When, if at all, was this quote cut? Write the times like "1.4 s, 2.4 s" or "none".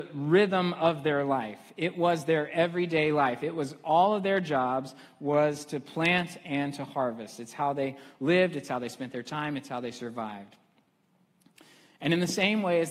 none